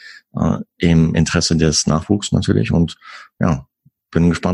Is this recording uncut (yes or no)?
yes